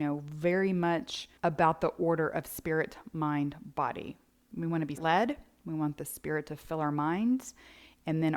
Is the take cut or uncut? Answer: cut